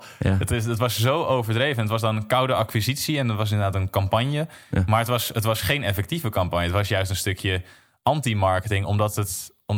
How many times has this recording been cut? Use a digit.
0